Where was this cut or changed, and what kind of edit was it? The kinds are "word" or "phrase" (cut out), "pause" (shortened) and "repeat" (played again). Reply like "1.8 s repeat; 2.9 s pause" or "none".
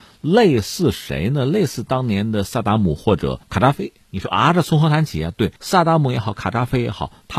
3.4 s pause; 5.6 s pause